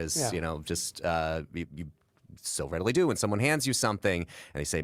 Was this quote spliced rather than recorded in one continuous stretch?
no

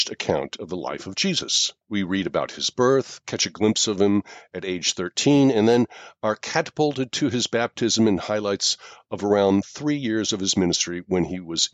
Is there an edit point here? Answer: yes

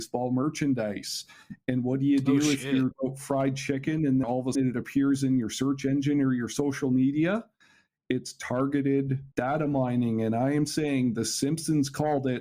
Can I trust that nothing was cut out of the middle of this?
no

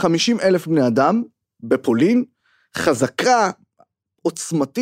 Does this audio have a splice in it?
no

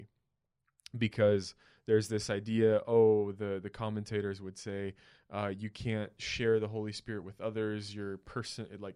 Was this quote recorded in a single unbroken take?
yes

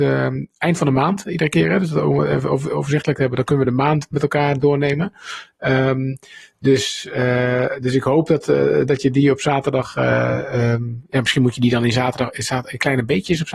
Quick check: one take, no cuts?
yes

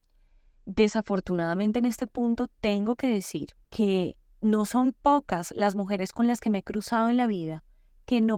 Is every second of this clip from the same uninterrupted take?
no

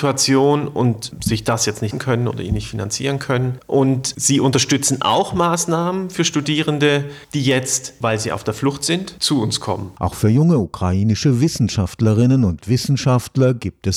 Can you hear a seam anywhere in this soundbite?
yes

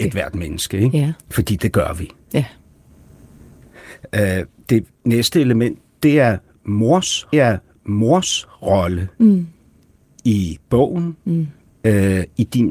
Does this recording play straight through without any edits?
no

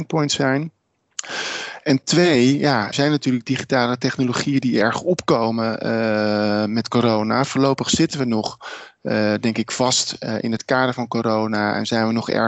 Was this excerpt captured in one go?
no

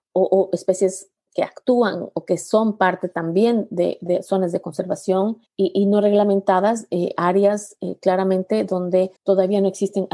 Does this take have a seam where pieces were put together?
yes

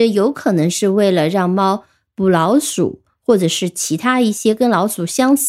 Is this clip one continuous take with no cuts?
yes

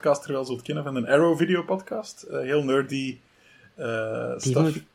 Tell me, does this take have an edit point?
no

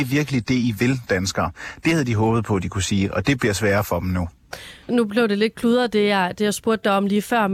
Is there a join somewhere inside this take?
yes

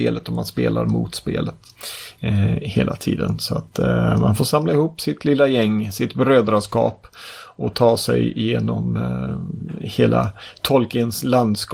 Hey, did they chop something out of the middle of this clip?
no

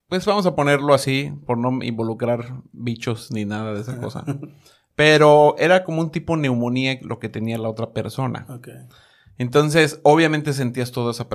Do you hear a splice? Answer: no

